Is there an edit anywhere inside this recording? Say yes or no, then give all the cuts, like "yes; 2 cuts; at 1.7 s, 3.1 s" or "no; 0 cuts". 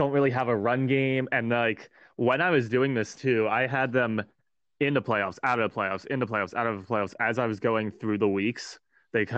no; 0 cuts